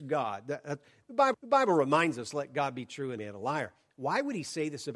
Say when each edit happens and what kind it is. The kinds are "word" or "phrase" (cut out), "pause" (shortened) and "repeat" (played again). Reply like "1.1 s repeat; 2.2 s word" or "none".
1.3 s repeat; 3.2 s word